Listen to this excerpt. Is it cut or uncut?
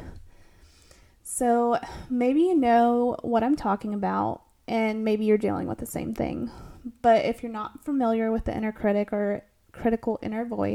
uncut